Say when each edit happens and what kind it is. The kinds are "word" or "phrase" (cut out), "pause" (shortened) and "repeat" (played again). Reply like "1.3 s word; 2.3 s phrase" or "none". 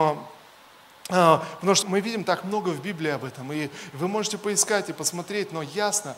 1.8 s word